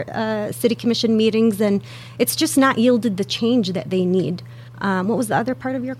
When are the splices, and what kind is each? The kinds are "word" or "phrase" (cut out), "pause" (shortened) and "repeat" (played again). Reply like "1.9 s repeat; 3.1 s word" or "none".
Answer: 4.7 s pause

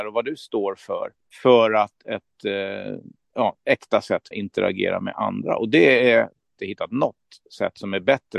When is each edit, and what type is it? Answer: 1.2 s pause; 2.0 s phrase; 4.3 s word; 6.6 s phrase

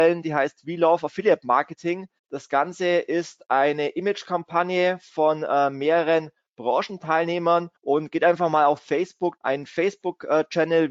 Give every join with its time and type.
2.2 s pause; 7.8 s pause; 9.4 s phrase

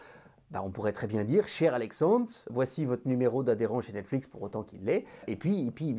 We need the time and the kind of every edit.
2.5 s word

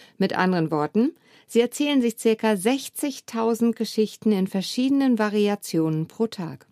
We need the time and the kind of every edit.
none

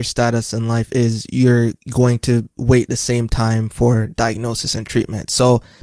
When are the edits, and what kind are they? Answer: 1.8 s pause

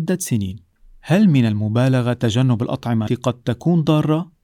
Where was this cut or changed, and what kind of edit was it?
3.1 s word

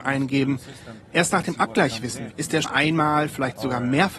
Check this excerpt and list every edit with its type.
2.3 s word; 2.6 s word

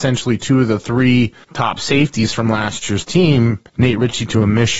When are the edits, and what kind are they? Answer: 1.4 s pause; 3.7 s pause

